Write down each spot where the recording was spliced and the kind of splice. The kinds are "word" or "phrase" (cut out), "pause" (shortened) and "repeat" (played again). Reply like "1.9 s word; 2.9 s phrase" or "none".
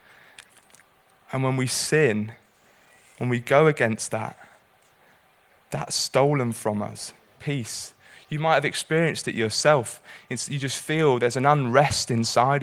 7.4 s phrase